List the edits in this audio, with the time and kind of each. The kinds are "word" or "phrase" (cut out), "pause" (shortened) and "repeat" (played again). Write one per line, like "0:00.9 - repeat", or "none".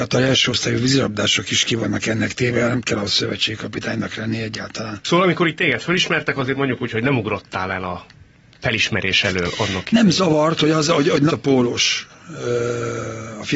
0:11.3 - word